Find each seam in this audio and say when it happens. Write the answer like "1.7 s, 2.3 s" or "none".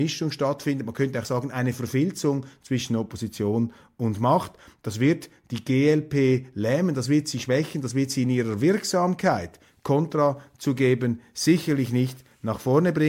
none